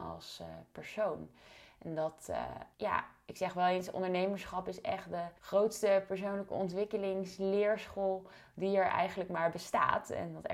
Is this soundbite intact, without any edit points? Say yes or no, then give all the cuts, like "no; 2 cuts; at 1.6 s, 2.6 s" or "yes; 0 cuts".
no; 2 cuts; at 2.7 s, 5.4 s